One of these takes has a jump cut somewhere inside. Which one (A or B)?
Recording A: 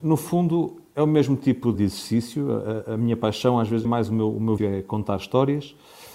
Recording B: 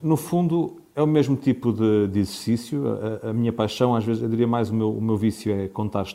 A